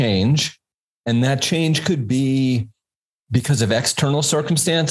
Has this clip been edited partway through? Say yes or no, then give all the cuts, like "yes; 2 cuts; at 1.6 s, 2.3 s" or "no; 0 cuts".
no; 0 cuts